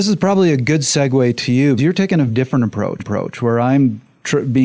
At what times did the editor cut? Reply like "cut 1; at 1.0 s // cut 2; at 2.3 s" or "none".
cut 1; at 1.8 s // cut 2; at 2.3 s // cut 3; at 3.0 s